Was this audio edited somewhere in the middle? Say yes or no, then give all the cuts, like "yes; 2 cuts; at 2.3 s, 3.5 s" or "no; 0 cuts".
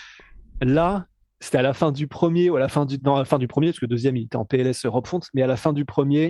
yes; 1 cut; at 3.0 s